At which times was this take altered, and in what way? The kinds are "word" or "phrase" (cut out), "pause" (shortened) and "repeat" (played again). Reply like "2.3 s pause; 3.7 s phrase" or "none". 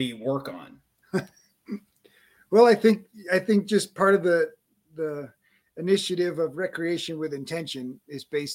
none

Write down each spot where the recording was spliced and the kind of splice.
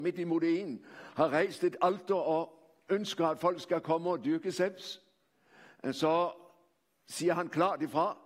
none

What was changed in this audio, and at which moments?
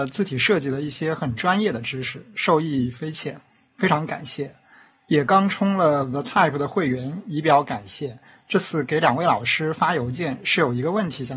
none

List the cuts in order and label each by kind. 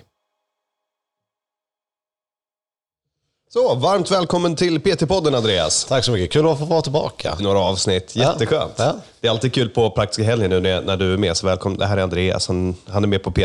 7.4 s phrase

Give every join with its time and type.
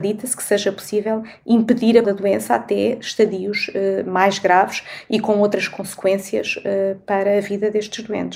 2.0 s word

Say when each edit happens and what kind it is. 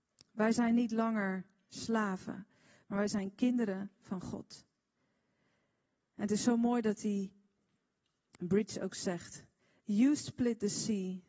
none

